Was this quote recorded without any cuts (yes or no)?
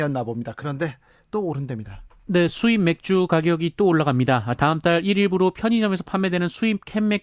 yes